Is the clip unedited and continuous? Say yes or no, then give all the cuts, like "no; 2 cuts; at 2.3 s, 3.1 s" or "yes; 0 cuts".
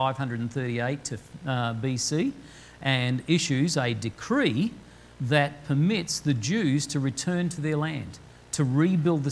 no; 1 cut; at 5.1 s